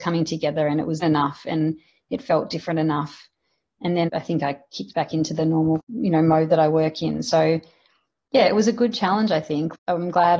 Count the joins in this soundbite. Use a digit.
2